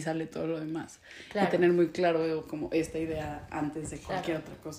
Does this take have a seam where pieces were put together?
no; 0 cuts

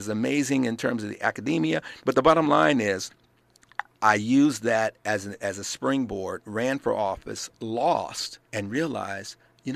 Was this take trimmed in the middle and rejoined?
yes; 2 cuts; at 2.0 s, 8.4 s

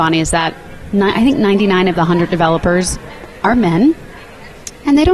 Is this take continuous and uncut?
yes; 0 cuts

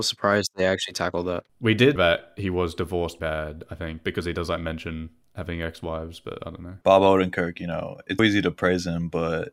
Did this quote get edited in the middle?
yes; 5 cuts; at 1.5 s, 2.0 s, 3.2 s, 6.8 s, 8.2 s

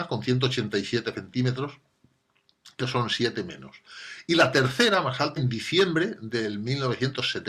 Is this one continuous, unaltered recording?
no; 2 cuts; at 2.8 s, 5.4 s

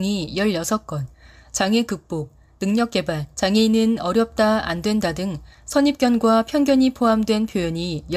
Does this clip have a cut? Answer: yes; 1 cut; at 3.3 s

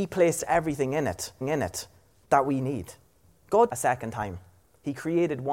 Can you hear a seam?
yes; 2 cuts; at 1.4 s, 3.7 s

